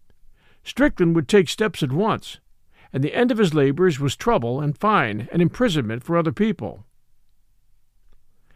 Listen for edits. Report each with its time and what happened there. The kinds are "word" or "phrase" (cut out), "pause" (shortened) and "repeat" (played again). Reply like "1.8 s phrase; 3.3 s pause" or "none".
none